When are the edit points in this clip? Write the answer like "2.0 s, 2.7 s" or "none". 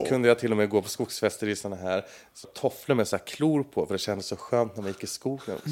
2.4 s